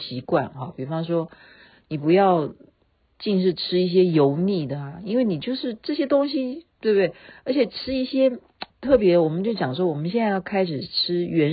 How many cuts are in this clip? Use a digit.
1